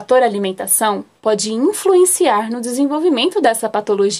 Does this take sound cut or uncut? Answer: uncut